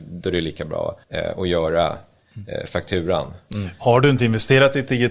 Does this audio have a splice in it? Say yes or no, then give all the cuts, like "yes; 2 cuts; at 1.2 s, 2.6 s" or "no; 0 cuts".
yes; 1 cut; at 1.0 s